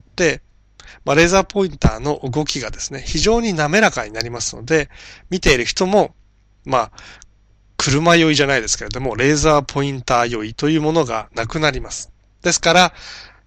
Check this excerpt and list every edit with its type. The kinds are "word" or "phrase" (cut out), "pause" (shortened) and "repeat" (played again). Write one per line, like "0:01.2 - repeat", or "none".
none